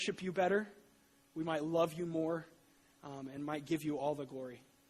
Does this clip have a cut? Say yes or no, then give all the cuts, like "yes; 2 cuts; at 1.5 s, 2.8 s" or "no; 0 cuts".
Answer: no; 0 cuts